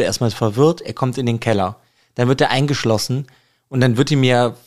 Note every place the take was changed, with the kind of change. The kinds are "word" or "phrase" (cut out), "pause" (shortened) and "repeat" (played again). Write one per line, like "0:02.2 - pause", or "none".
none